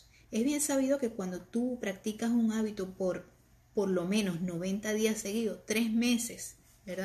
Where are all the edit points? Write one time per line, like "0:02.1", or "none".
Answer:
none